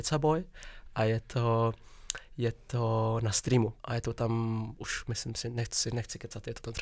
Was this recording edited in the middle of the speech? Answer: yes; 1 cut; at 3.8 s

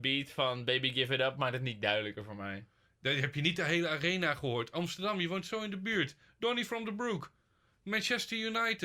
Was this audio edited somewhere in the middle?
no; 0 cuts

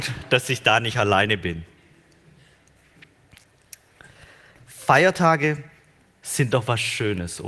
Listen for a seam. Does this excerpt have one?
no; 0 cuts

